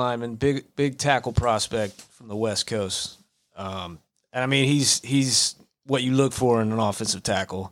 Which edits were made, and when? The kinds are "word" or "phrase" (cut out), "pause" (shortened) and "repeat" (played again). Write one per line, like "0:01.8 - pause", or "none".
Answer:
none